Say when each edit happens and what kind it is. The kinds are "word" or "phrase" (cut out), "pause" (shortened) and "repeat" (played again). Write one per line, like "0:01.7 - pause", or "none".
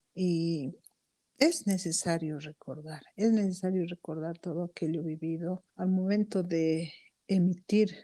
0:05.7 - pause